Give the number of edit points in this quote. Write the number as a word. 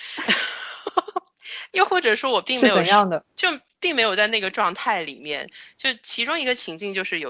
one